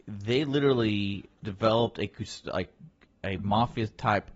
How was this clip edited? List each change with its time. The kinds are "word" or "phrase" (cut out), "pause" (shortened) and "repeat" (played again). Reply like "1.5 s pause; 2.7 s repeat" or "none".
none